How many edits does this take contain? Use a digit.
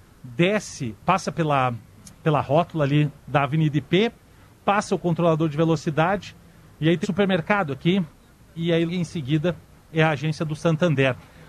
3